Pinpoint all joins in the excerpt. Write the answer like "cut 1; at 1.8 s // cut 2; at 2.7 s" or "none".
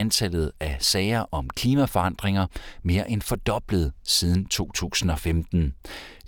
none